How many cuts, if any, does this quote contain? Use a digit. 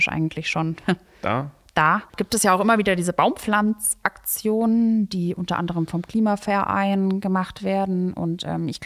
1